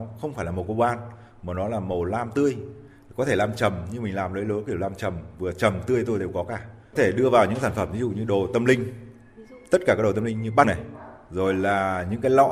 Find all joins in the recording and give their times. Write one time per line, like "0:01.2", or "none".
0:07.0
0:10.6